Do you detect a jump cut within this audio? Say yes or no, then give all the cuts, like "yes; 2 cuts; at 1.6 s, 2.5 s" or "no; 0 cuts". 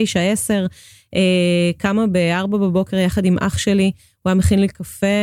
no; 0 cuts